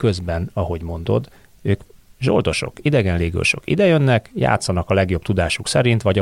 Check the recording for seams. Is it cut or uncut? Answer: uncut